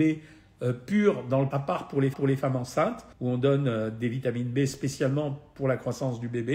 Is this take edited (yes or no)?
yes